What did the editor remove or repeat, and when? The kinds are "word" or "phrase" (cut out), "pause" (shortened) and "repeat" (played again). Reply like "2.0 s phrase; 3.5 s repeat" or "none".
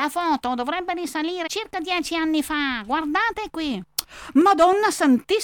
1.5 s word